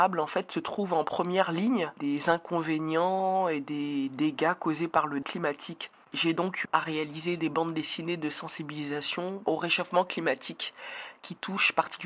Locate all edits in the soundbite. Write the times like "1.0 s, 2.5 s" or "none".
5.2 s, 6.0 s, 6.6 s